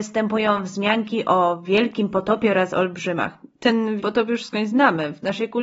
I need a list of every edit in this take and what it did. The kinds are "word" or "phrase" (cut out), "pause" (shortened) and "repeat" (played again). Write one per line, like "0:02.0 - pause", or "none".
0:04.0 - word